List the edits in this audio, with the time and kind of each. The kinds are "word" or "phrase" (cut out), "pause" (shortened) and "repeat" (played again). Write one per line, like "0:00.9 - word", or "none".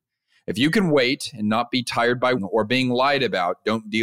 0:02.4 - word